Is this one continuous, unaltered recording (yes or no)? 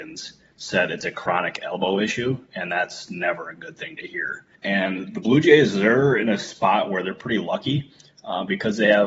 no